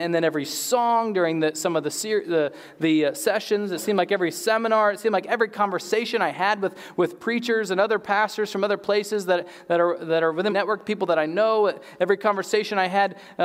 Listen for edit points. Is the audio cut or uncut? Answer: cut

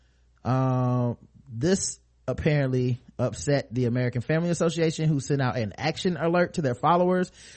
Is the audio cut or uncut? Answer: uncut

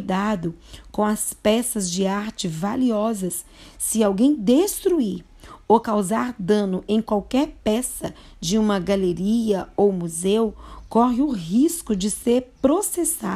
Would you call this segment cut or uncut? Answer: uncut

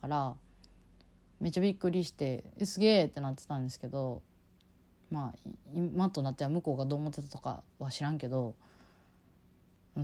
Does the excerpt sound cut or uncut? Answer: uncut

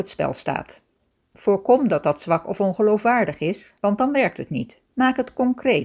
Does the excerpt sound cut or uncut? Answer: cut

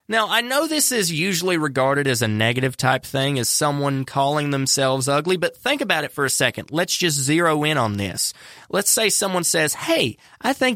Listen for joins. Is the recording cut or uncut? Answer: uncut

